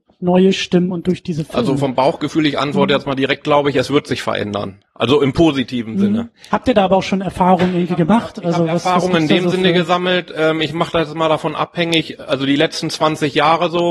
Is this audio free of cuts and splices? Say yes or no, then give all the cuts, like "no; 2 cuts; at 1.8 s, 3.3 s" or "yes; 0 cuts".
yes; 0 cuts